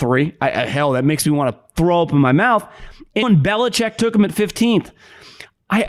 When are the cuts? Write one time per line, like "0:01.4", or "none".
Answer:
0:03.2